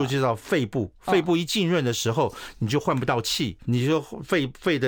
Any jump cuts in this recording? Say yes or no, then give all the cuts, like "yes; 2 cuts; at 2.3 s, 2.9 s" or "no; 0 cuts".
yes; 1 cut; at 3.7 s